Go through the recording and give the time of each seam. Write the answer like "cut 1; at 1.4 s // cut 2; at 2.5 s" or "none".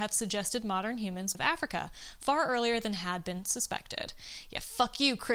cut 1; at 1.3 s